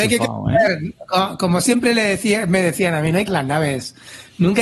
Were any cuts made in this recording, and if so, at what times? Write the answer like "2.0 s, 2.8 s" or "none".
3.3 s